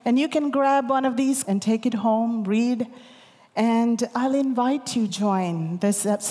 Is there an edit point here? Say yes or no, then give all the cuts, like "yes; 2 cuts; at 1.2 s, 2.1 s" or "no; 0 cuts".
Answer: yes; 2 cuts; at 1.4 s, 5.1 s